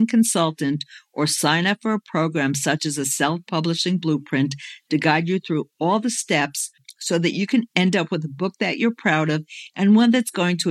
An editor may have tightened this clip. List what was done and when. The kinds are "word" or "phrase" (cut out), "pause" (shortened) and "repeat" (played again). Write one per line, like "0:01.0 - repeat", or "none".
none

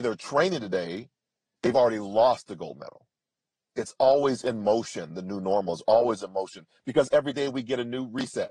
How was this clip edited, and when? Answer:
0:03.3 - pause

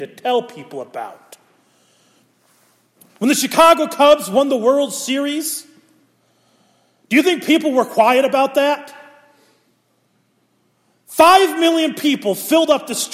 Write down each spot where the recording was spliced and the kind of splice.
none

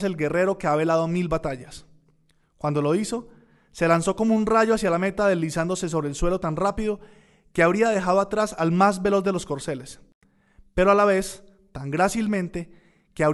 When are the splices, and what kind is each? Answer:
none

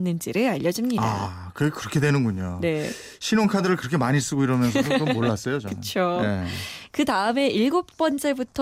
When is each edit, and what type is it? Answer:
none

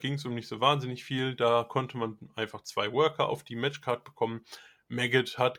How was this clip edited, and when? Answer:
none

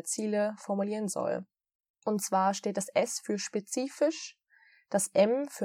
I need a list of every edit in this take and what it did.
none

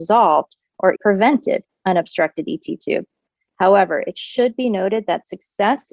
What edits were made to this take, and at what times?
0:01.0 - word

